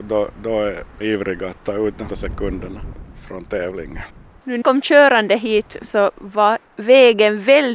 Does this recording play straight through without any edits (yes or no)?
no